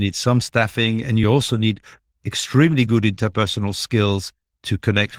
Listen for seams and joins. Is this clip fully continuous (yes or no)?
yes